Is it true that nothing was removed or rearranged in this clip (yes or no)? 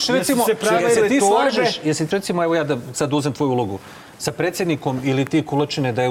no